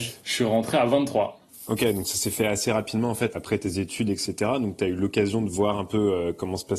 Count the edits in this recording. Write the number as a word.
one